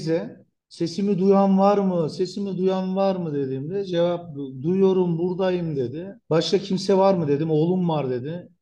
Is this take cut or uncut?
uncut